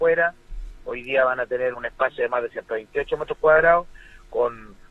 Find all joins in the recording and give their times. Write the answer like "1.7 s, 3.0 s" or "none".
1.7 s